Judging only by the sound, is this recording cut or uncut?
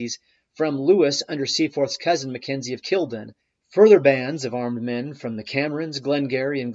cut